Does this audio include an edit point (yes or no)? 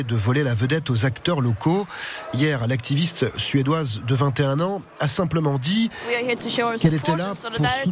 no